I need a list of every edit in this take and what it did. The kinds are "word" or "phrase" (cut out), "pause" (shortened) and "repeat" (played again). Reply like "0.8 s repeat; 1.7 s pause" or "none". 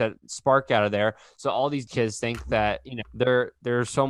1.9 s word; 3.0 s word